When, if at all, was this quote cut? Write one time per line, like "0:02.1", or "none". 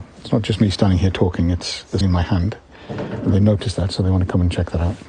0:02.0